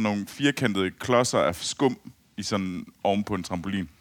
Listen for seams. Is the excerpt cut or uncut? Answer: uncut